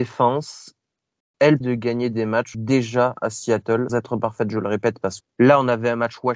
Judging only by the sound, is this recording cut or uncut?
cut